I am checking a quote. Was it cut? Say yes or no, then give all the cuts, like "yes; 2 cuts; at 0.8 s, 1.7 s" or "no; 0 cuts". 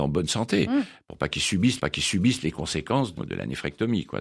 yes; 2 cuts; at 1.8 s, 3.2 s